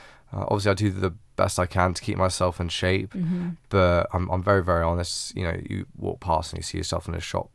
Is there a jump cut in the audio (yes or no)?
no